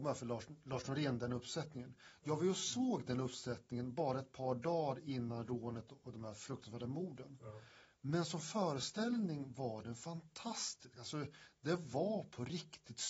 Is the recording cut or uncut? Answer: uncut